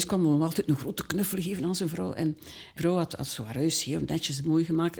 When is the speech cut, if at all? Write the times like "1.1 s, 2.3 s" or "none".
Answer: 2.8 s